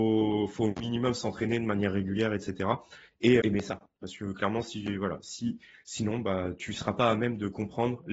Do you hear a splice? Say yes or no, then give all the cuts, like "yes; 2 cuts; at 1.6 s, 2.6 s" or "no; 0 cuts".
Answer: yes; 1 cut; at 3.4 s